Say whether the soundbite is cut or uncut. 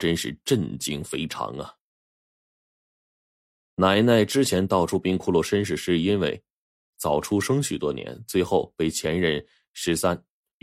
uncut